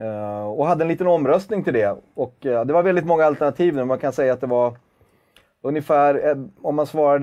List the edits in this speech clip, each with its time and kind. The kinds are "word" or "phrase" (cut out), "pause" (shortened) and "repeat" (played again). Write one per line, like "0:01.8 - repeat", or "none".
none